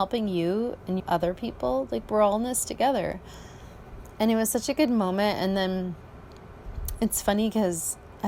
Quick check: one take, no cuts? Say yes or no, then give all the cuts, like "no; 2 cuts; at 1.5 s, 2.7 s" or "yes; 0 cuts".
no; 1 cut; at 1.0 s